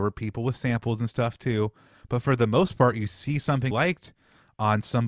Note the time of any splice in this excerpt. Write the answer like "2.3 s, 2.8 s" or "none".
3.7 s